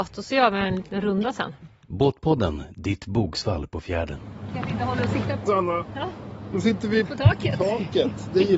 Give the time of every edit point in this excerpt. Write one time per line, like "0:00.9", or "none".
0:05.5
0:07.0